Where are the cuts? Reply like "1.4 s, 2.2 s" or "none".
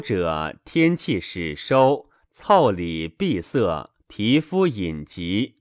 4.0 s